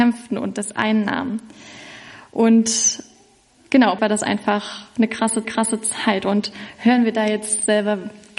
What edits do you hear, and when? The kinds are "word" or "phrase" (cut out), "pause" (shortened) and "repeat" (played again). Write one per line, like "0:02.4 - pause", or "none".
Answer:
0:04.0 - phrase
0:05.4 - repeat